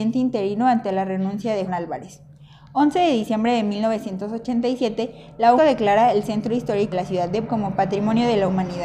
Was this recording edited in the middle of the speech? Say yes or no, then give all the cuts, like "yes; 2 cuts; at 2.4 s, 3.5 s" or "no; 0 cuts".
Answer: yes; 4 cuts; at 1.7 s, 5.6 s, 6.9 s, 7.5 s